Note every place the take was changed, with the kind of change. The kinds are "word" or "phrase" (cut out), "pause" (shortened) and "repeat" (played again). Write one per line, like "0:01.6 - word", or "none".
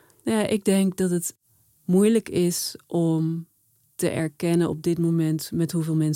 none